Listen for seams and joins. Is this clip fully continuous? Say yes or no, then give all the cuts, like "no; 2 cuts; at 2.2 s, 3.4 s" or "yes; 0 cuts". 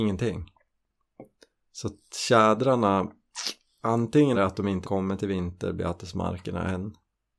no; 2 cuts; at 4.3 s, 4.8 s